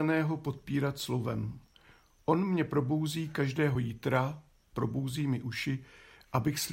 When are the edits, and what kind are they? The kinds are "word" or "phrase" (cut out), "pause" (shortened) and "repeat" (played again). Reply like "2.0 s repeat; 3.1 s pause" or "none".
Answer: none